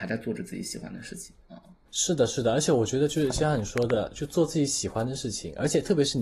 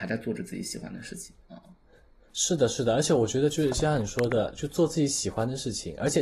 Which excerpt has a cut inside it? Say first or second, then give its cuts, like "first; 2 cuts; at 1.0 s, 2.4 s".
first; 1 cut; at 1.8 s